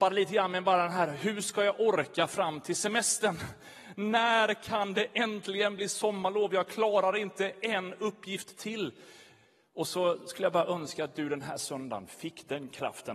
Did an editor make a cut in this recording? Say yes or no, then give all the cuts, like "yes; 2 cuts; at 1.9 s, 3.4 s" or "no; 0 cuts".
no; 0 cuts